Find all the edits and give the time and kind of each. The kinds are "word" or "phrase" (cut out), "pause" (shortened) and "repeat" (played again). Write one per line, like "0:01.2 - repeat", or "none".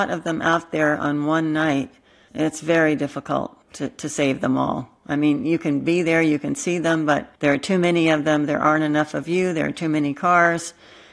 0:02.3 - word
0:03.6 - pause
0:07.4 - pause